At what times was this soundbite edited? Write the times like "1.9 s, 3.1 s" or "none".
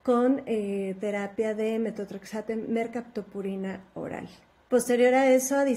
4.5 s

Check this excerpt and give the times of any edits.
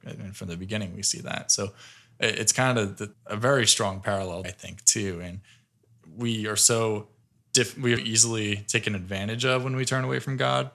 3.1 s, 4.4 s, 7.2 s, 8.0 s

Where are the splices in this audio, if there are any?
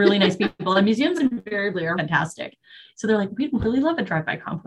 2.0 s

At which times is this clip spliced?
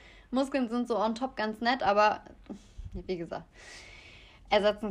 none

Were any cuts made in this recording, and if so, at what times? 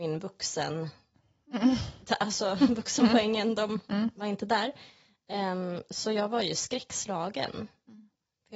none

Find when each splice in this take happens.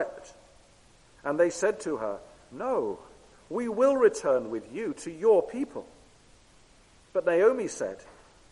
none

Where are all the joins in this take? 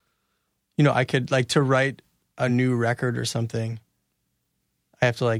none

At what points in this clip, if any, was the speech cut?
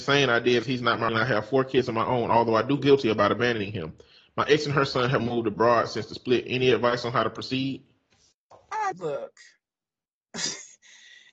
1.1 s, 2.8 s, 5.2 s, 8.9 s

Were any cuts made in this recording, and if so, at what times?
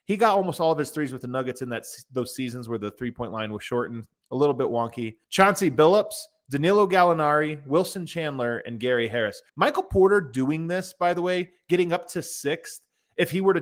5.2 s, 9.5 s

